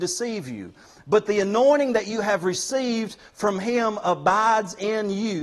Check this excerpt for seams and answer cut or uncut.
uncut